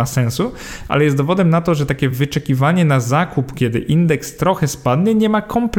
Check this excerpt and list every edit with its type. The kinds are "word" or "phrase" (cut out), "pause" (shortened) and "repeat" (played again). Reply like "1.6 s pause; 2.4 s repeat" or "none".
none